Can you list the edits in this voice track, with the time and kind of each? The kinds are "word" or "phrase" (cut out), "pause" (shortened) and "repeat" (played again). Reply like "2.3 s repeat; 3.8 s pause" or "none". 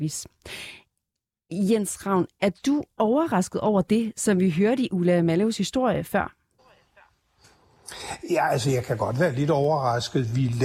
none